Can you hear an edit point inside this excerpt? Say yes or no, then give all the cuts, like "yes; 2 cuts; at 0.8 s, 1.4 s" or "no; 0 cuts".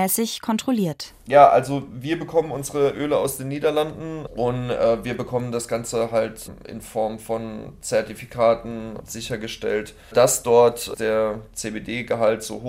no; 0 cuts